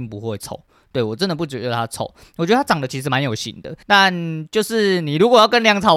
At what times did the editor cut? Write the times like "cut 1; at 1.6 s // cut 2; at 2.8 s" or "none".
cut 1; at 3.8 s